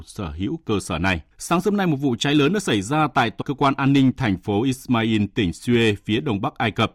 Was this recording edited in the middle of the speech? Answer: yes; 2 cuts; at 1.3 s, 3.4 s

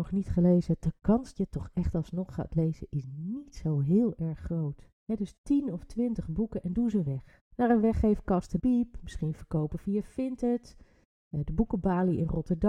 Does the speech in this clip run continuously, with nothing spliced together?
no; 4 cuts; at 1.4 s, 4.9 s, 7.5 s, 8.6 s

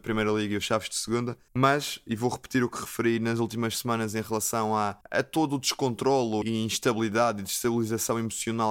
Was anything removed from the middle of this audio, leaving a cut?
yes; 3 cuts; at 1.5 s, 5.0 s, 6.4 s

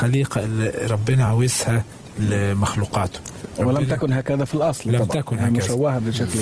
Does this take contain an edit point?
no; 0 cuts

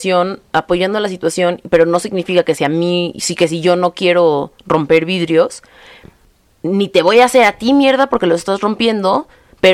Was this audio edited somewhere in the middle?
no; 0 cuts

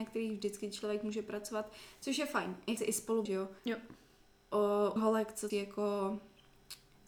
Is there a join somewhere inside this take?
yes; 5 cuts; at 2.8 s, 3.3 s, 3.6 s, 5.0 s, 5.5 s

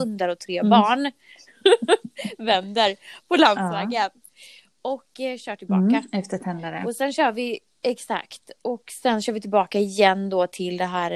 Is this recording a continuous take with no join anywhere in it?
yes; 0 cuts

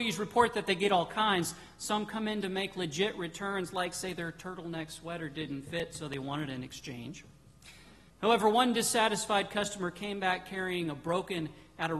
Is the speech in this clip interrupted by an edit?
yes; 1 cut; at 8.1 s

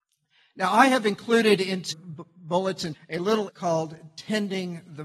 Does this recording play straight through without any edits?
no; 3 cuts; at 1.9 s, 2.9 s, 3.5 s

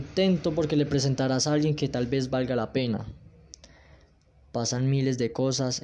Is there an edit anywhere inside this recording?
no; 0 cuts

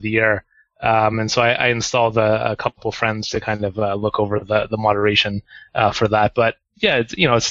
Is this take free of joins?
yes; 0 cuts

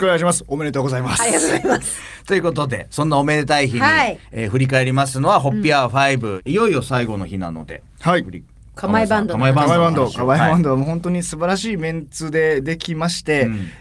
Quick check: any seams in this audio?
no; 0 cuts

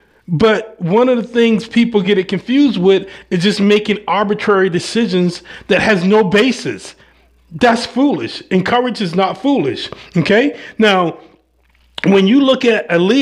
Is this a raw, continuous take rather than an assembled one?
yes; 0 cuts

